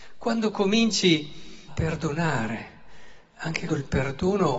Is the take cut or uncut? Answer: cut